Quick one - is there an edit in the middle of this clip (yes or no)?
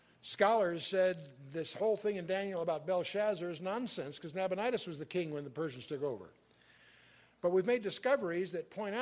no